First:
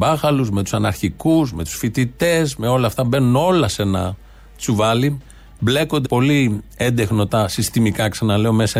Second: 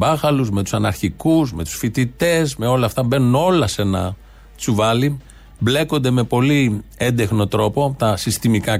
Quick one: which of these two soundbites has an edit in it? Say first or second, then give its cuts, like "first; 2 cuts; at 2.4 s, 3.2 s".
first; 2 cuts; at 6.0 s, 7.3 s